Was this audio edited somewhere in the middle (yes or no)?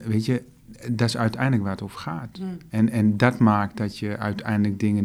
no